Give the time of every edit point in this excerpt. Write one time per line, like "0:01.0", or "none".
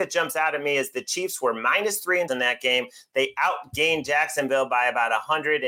0:02.3